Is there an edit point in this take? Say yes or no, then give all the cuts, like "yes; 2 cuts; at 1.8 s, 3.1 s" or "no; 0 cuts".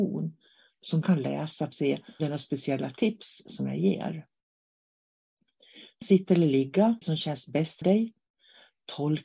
yes; 6 cuts; at 1.0 s, 1.7 s, 2.2 s, 6.0 s, 7.0 s, 7.8 s